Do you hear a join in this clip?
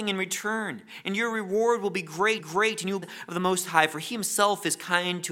yes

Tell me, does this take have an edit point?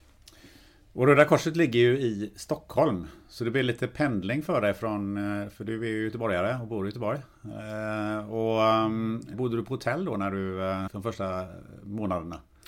yes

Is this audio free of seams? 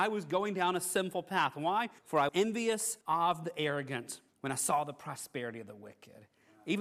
no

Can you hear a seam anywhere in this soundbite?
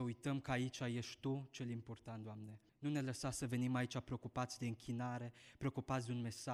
yes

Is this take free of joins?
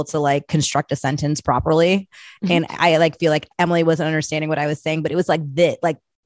yes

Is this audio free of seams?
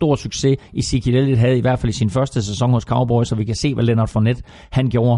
yes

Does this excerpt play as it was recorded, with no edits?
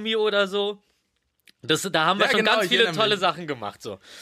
yes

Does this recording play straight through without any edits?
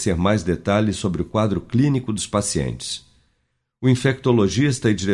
yes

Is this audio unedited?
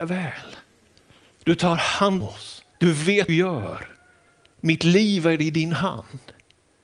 no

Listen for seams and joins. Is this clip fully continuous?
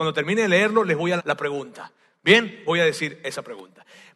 no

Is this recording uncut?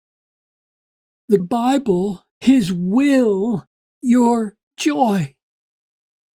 no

